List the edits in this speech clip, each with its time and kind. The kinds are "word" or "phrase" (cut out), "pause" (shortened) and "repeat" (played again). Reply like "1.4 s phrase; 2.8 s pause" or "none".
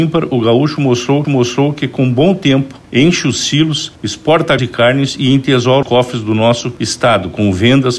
1.2 s repeat; 2.8 s pause; 4.6 s word; 5.8 s word